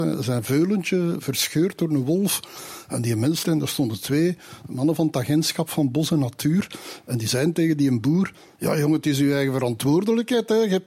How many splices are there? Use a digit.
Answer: 1